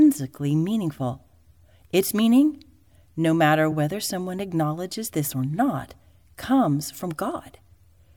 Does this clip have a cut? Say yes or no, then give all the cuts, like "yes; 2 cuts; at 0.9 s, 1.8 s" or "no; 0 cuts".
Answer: no; 0 cuts